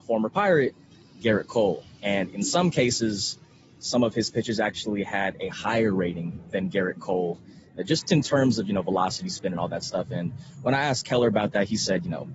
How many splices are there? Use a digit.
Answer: 1